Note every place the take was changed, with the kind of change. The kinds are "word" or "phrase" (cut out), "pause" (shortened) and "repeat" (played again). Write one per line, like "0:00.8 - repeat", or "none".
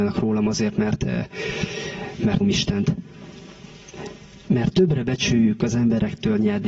0:02.4 - word
0:04.5 - word